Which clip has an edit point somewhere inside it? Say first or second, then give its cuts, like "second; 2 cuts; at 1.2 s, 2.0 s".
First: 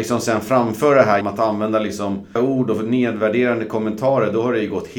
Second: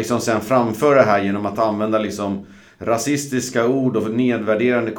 first; 2 cuts; at 1.2 s, 2.4 s